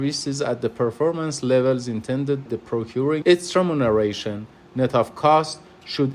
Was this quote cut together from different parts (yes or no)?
yes